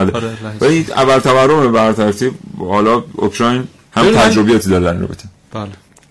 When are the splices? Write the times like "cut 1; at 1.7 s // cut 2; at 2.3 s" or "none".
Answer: none